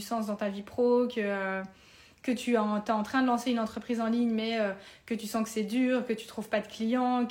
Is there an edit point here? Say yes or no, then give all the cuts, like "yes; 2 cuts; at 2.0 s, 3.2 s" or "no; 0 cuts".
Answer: no; 0 cuts